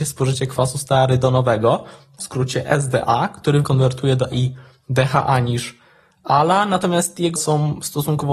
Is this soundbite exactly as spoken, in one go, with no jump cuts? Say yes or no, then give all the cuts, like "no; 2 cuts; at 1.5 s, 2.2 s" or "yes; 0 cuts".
no; 3 cuts; at 3.6 s, 4.3 s, 7.4 s